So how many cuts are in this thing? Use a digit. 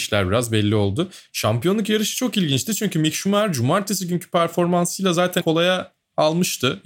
1